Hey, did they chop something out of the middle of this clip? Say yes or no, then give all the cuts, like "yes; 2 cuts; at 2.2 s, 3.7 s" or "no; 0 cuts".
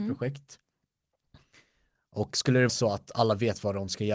yes; 1 cut; at 2.7 s